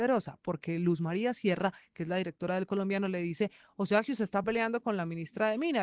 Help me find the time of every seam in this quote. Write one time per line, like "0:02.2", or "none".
none